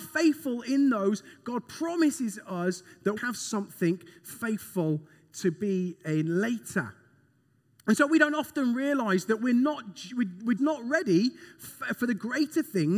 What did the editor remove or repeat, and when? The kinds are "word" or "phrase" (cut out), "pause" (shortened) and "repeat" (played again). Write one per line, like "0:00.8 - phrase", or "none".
0:03.2 - word
0:10.6 - word
0:11.6 - word